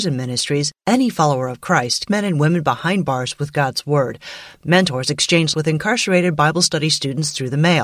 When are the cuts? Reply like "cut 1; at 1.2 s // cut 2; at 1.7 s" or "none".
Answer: cut 1; at 2.1 s // cut 2; at 5.5 s